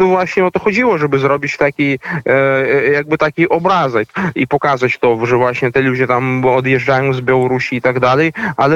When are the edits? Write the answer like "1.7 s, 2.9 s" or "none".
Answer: none